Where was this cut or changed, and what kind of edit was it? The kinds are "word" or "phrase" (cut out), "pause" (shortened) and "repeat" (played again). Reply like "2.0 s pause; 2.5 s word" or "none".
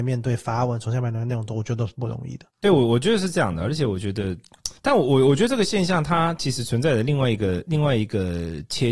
2.5 s pause; 4.8 s pause